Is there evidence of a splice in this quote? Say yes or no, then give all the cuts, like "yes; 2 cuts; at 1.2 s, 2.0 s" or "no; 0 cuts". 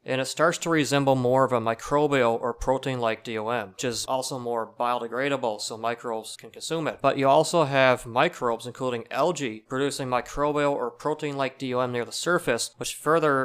no; 0 cuts